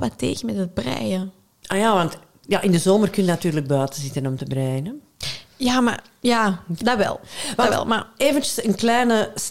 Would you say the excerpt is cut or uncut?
uncut